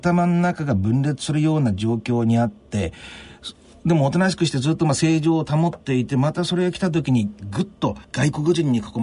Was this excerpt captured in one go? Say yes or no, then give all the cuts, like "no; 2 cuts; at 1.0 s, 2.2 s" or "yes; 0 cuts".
no; 1 cut; at 8.0 s